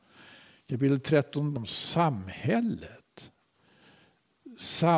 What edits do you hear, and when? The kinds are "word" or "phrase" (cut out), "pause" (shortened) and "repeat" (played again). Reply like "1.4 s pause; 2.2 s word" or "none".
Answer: 1.6 s word